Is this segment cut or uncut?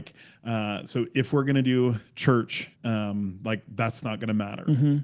cut